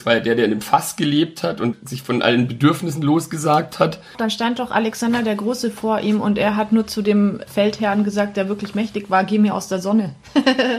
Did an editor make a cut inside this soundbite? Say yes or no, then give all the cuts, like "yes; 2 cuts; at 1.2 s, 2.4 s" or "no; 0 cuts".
no; 0 cuts